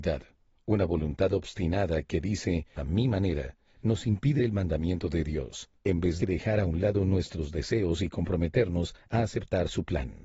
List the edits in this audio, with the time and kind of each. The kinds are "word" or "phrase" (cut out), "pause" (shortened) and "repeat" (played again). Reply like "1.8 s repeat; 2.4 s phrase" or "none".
2.8 s phrase; 4.4 s word; 5.8 s pause; 6.2 s phrase